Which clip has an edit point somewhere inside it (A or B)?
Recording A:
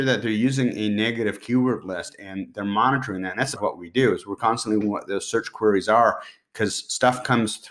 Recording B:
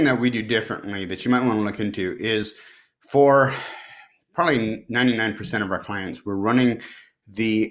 A